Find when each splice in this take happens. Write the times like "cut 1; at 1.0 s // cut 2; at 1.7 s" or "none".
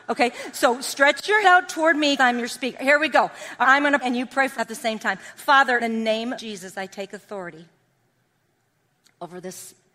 cut 1; at 1.4 s // cut 2; at 2.2 s // cut 3; at 3.6 s // cut 4; at 4.0 s // cut 5; at 4.5 s // cut 6; at 5.8 s // cut 7; at 6.3 s